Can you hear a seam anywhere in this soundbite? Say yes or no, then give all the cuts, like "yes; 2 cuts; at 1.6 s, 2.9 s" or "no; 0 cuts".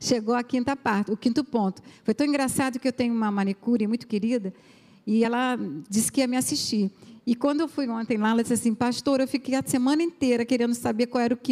no; 0 cuts